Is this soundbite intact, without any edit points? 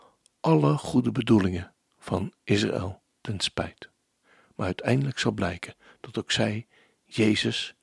yes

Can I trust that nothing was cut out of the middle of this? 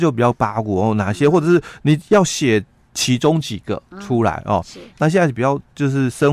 yes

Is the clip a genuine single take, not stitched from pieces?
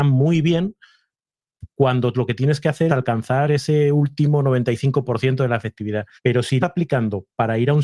no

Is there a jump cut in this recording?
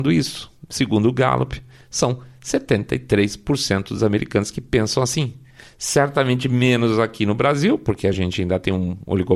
no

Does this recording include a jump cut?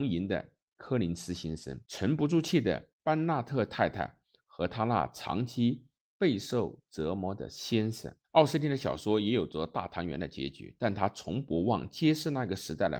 yes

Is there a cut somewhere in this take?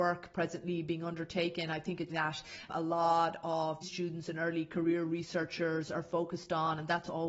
yes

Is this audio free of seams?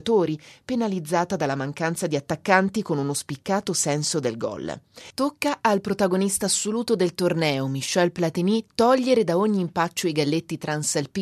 yes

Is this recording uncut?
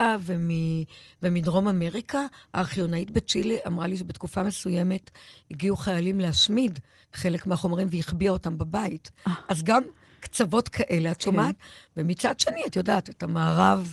yes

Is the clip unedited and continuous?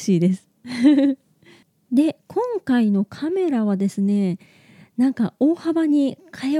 yes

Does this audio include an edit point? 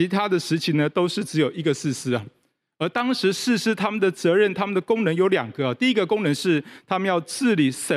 no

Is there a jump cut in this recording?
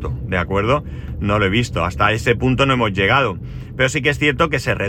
no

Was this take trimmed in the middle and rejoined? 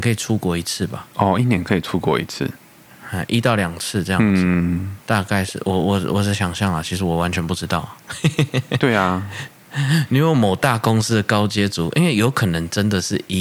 yes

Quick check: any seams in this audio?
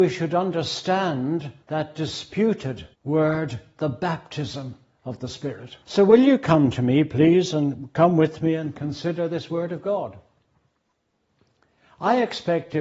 yes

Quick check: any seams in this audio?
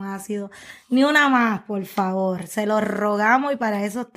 no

